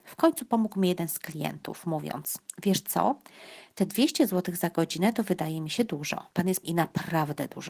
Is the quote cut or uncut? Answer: cut